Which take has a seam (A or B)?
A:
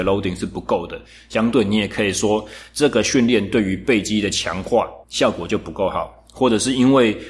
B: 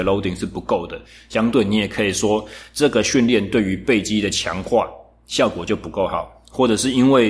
A